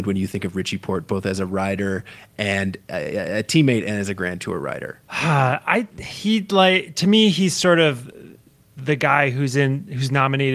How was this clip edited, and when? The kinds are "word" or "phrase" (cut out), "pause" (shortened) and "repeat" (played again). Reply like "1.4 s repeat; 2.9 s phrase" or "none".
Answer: none